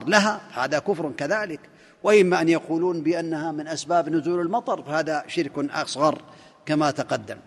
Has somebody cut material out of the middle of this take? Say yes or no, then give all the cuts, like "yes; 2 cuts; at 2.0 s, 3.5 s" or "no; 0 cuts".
no; 0 cuts